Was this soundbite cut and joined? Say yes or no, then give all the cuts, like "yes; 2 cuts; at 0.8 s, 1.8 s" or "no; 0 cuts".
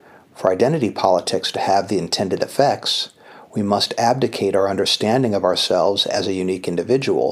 no; 0 cuts